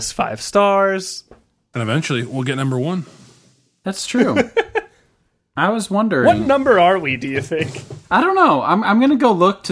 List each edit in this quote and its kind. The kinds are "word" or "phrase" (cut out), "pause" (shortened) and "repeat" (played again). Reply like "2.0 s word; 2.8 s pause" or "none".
none

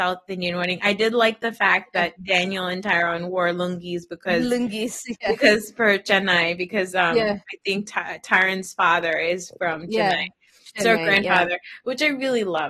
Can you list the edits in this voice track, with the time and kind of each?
none

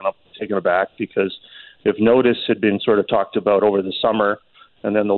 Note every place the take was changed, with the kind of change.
none

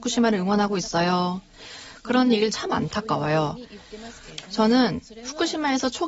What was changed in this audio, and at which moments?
2.5 s phrase

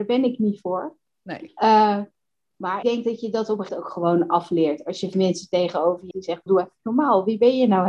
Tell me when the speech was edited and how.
2.8 s word; 3.7 s word; 5.1 s word; 6.1 s word; 6.5 s word

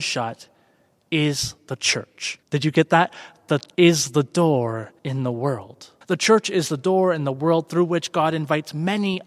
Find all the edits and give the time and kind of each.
2.4 s pause; 3.7 s word; 5.0 s pause; 6.0 s pause

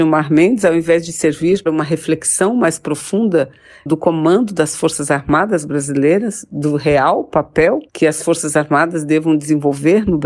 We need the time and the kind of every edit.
1.7 s word; 3.9 s word; 7.9 s pause

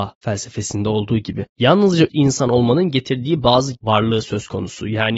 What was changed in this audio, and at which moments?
2.1 s word; 3.8 s word

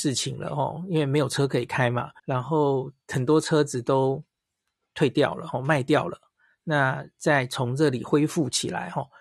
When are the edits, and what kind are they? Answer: 2.2 s pause

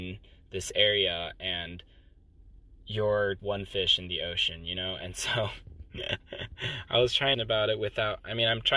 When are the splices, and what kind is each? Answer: 3.4 s word; 7.3 s phrase

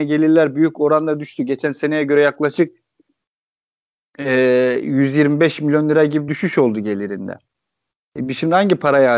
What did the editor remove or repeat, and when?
6.3 s word

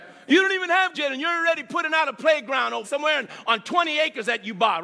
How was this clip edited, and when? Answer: 0.9 s word; 2.8 s word

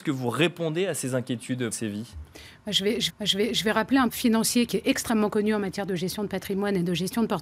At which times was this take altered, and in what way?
1.7 s word; 3.1 s repeat; 4.1 s word

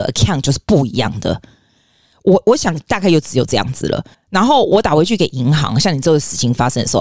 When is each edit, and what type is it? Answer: 4.1 s pause

